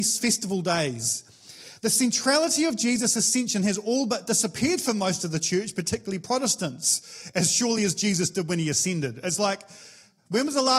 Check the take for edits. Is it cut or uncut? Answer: uncut